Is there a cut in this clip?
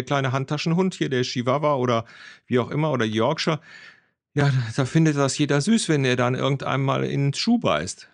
no; 0 cuts

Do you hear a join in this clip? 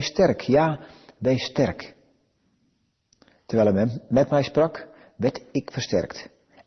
no; 0 cuts

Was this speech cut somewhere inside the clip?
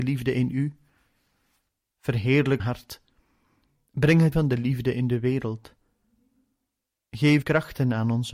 yes; 3 cuts; at 2.6 s, 4.3 s, 7.4 s

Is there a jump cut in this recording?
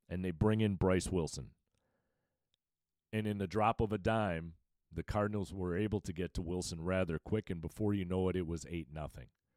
no; 0 cuts

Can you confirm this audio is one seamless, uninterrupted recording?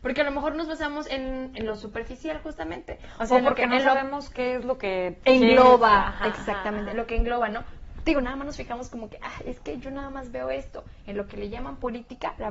yes; 0 cuts

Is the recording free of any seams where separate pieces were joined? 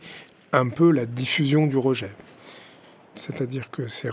yes; 0 cuts

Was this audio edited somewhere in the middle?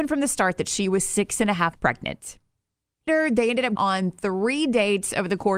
yes; 3 cuts; at 1.8 s, 3.1 s, 3.8 s

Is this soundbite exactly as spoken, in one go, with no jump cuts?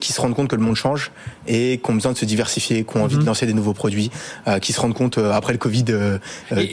yes; 0 cuts

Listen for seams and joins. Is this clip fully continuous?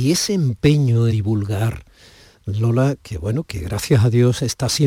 no; 2 cuts; at 1.1 s, 3.0 s

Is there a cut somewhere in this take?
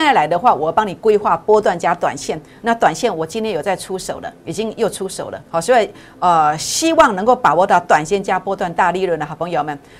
yes; 2 cuts; at 4.4 s, 5.4 s

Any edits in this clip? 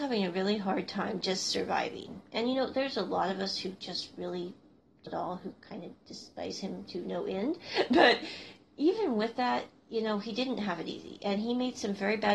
yes; 1 cut; at 5.1 s

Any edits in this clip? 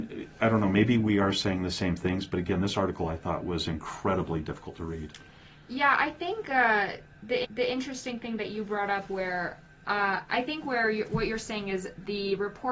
yes; 1 cut; at 7.4 s

